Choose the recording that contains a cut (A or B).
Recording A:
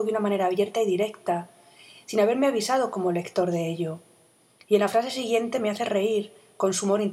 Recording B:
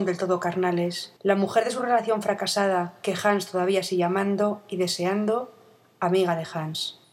B